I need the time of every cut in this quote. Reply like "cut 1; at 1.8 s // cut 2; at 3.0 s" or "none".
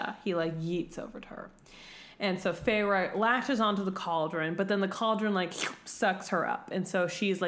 none